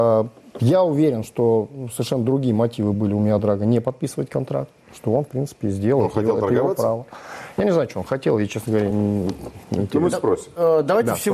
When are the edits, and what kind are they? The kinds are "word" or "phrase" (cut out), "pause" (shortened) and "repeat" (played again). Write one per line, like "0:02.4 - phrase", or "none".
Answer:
none